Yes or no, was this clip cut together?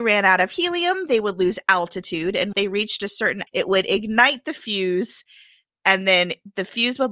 yes